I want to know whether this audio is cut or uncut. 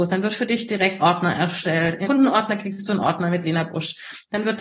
cut